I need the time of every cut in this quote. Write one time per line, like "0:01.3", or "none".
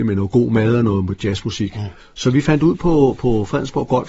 0:02.0